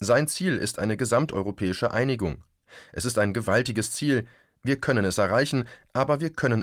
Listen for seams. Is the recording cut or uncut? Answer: uncut